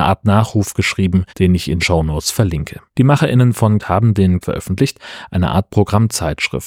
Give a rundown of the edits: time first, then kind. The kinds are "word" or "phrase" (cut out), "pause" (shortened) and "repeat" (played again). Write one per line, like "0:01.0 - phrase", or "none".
0:01.3 - pause
0:01.8 - word
0:02.9 - pause
0:03.8 - word
0:04.4 - phrase